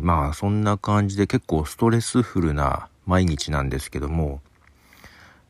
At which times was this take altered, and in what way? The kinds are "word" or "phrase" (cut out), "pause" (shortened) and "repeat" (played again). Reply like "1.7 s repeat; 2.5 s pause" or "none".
2.9 s pause